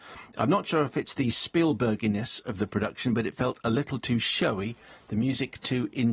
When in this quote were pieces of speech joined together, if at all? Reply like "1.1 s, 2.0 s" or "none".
none